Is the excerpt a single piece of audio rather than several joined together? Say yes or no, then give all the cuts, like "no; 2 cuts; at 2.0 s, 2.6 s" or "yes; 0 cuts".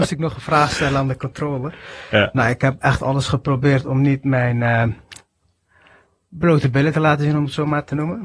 yes; 0 cuts